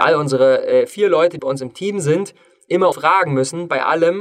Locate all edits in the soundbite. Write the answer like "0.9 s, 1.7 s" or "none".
1.4 s, 2.9 s